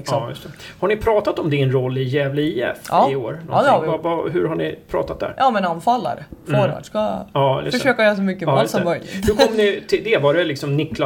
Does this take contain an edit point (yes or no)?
no